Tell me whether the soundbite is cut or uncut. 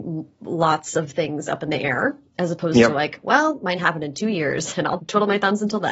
cut